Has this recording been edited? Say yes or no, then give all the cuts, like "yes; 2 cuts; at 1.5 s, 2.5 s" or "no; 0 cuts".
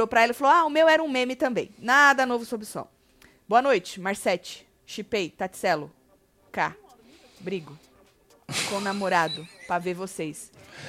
no; 0 cuts